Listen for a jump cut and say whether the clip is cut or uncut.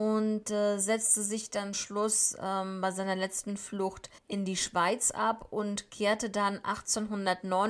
cut